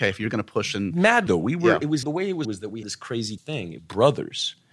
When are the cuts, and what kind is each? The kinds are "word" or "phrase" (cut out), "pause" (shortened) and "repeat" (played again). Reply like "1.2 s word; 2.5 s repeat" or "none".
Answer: 1.3 s word; 2.0 s word; 2.4 s phrase; 2.8 s word; 3.4 s word; 3.8 s word

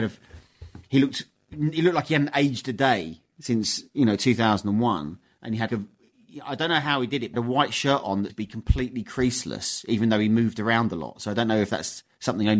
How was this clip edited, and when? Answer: 5.7 s word; 7.3 s word; 8.3 s word

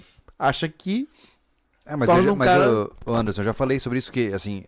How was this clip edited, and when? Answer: none

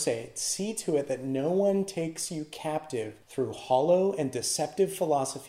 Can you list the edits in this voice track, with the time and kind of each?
3.2 s pause

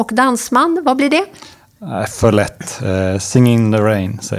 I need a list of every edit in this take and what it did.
none

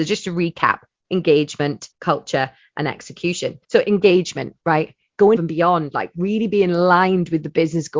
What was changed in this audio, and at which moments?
1.0 s word; 1.9 s word; 3.6 s pause; 4.6 s pause; 5.3 s word

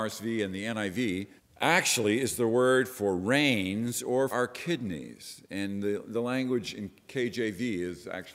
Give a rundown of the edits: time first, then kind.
1.4 s pause; 4.3 s word

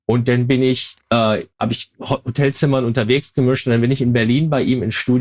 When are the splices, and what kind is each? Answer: 1.5 s pause

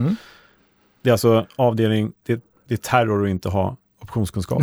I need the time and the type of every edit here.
none

